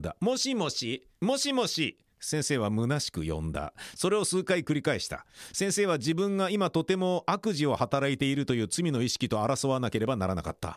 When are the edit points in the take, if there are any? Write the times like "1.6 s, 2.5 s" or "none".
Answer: 1.2 s